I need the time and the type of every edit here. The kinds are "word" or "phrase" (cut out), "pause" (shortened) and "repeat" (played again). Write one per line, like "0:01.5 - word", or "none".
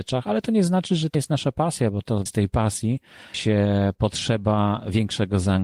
0:01.1 - word
0:02.3 - word
0:03.3 - word